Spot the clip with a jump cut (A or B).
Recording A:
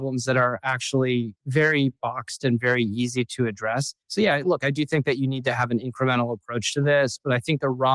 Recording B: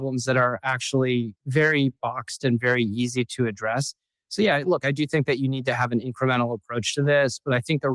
A